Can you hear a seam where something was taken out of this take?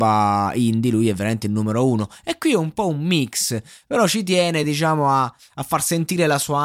no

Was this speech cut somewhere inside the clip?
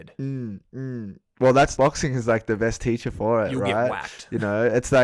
yes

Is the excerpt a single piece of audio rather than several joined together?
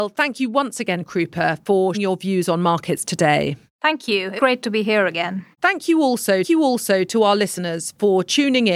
no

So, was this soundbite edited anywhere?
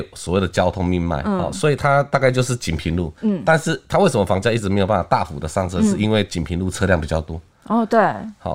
yes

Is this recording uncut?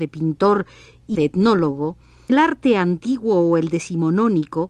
no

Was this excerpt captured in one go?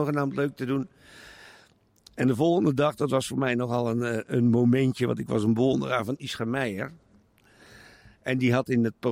no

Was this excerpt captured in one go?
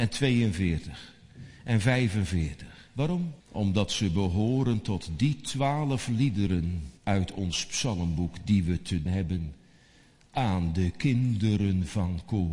no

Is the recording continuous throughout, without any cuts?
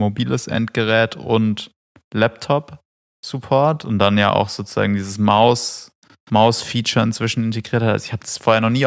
yes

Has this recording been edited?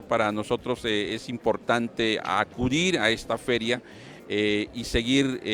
yes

